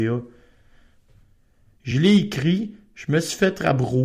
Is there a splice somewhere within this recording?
no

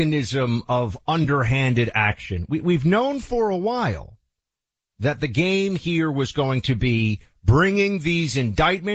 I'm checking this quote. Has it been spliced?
no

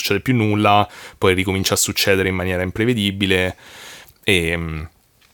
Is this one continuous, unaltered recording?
yes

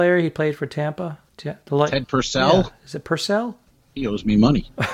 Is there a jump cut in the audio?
yes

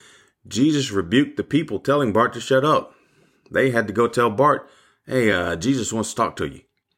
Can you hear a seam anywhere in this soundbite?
no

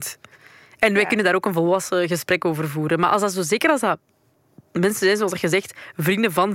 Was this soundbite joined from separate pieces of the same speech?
no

